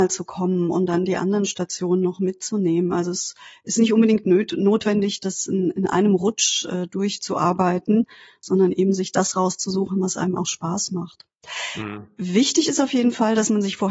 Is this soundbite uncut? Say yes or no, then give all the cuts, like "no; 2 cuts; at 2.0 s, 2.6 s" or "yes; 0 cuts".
yes; 0 cuts